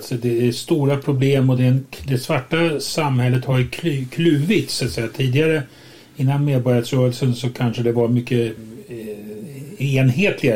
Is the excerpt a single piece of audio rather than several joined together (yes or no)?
yes